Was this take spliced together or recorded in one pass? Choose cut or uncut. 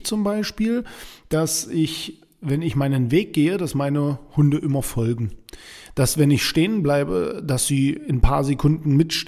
uncut